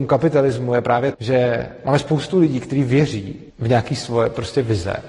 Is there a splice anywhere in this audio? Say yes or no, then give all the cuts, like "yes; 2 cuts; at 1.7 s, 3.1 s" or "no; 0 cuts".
yes; 2 cuts; at 1.1 s, 3.5 s